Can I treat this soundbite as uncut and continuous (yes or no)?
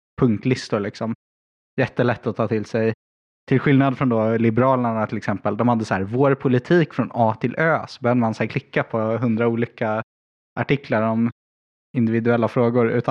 yes